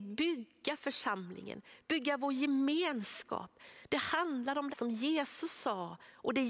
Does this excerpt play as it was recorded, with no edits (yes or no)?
no